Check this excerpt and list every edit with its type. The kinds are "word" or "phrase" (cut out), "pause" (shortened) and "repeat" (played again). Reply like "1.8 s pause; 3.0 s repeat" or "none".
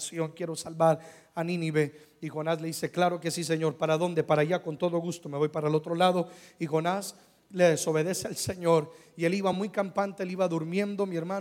none